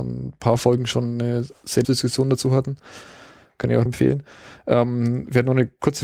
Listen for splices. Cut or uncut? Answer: cut